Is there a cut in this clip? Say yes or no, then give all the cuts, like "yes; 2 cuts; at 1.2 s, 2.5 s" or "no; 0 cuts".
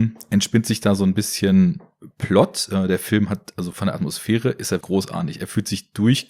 yes; 2 cuts; at 3.7 s, 4.8 s